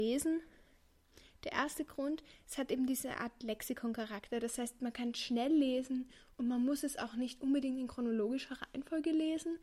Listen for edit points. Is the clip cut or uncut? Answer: uncut